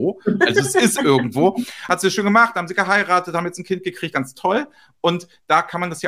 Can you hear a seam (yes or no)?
yes